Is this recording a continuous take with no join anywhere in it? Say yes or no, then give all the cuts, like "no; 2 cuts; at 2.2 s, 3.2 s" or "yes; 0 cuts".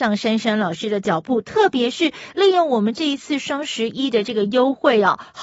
yes; 0 cuts